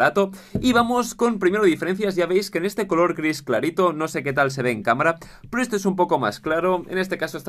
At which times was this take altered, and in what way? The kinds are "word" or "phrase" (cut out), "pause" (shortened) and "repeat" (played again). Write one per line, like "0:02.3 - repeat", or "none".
none